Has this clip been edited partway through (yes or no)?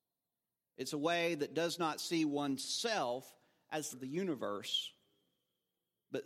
yes